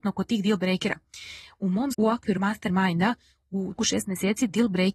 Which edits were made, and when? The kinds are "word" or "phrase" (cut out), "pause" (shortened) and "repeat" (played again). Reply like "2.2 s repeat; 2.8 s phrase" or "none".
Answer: 1.9 s word; 2.4 s word; 3.8 s word